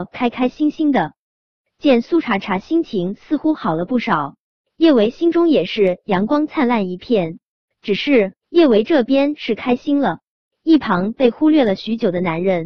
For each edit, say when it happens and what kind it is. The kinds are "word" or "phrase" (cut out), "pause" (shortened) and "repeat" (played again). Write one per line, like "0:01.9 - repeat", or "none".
0:08.4 - pause